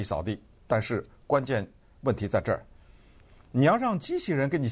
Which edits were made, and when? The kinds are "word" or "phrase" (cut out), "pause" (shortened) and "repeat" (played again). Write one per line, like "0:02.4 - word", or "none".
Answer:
none